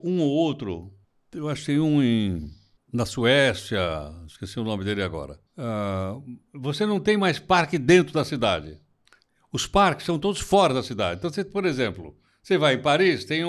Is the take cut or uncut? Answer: cut